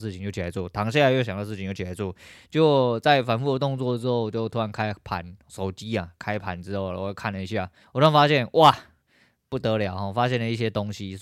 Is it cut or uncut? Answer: cut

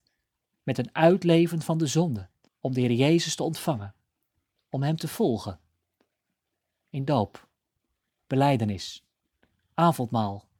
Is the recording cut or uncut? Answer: cut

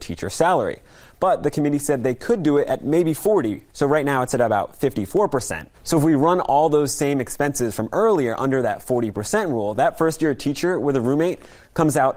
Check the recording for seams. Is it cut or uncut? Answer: cut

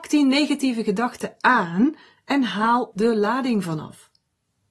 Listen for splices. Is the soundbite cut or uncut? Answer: cut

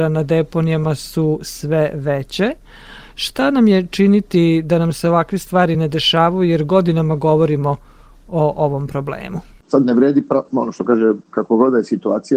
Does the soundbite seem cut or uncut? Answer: uncut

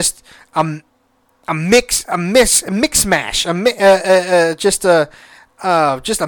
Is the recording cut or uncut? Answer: uncut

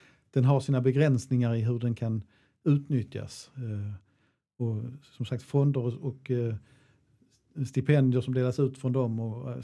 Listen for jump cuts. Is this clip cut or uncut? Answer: uncut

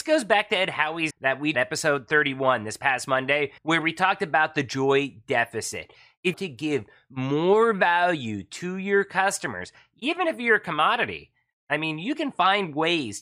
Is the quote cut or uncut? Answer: cut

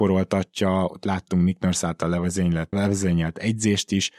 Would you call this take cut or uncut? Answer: uncut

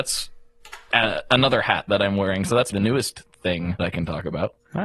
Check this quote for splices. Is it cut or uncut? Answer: cut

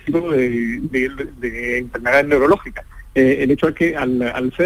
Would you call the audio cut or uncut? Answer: uncut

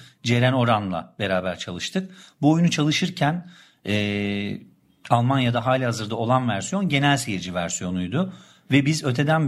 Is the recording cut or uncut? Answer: uncut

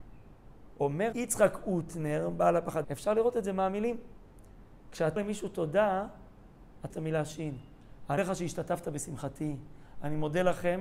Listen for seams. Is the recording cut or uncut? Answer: cut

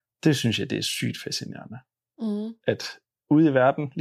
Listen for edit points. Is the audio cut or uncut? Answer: uncut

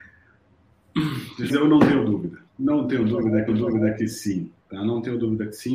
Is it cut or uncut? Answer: cut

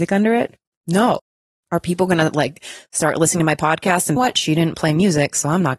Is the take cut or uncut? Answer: cut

